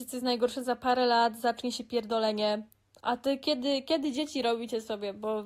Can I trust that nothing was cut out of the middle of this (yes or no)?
yes